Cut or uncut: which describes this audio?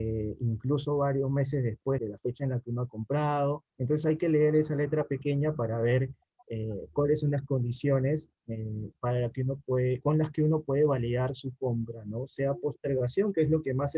cut